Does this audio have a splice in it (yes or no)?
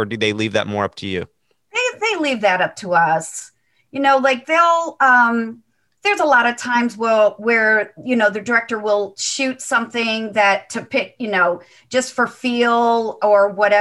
no